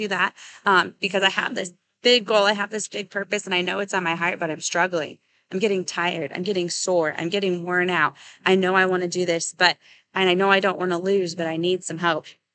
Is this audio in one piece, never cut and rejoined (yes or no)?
yes